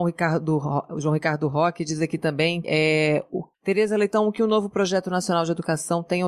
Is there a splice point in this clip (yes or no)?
yes